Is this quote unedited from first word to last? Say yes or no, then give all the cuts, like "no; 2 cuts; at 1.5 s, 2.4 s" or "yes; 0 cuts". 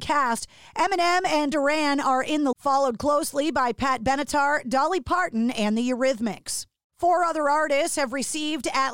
no; 2 cuts; at 1.5 s, 2.5 s